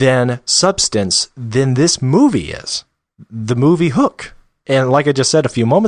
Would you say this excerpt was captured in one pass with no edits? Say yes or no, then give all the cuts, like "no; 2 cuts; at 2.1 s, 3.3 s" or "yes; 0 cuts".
yes; 0 cuts